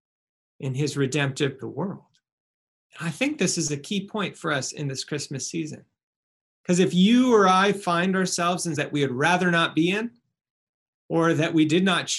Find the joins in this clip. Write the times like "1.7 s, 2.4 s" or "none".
1.6 s, 8.8 s